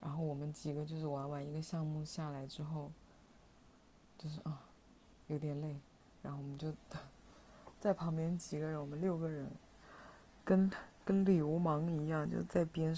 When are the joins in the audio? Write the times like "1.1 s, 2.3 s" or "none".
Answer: none